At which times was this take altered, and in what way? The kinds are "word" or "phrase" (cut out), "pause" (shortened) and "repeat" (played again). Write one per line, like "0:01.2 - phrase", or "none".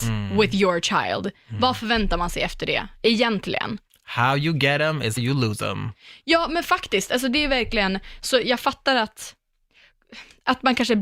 0:05.2 - word